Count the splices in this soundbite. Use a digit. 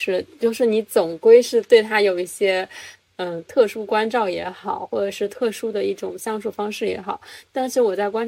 0